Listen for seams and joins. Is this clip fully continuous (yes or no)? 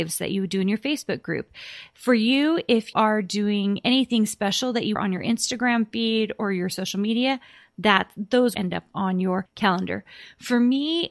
no